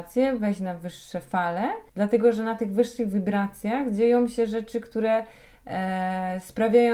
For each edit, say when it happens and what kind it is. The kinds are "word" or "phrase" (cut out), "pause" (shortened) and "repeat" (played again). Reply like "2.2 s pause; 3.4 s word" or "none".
1.9 s pause